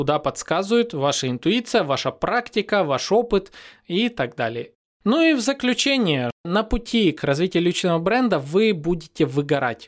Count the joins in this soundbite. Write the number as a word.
zero